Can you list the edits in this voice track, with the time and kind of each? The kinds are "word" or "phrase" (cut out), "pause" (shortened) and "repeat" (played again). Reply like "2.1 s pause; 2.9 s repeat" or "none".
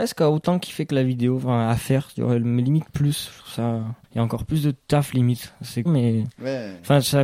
4.0 s pause; 5.9 s phrase